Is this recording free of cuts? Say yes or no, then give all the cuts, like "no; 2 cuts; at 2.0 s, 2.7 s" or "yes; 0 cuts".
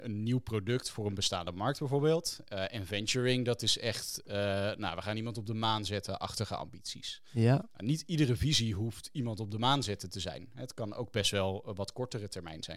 yes; 0 cuts